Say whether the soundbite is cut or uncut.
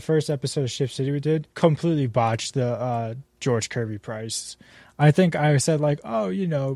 cut